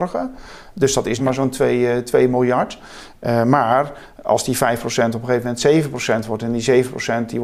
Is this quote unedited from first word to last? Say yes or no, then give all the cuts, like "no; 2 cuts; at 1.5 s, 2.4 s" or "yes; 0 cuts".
no; 1 cut; at 1.2 s